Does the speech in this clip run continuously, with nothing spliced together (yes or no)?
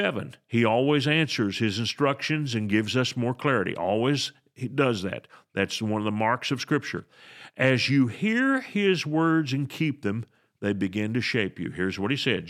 yes